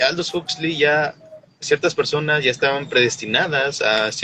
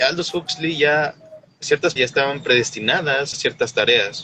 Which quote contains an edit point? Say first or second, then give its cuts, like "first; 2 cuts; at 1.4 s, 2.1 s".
second; 2 cuts; at 2.0 s, 3.3 s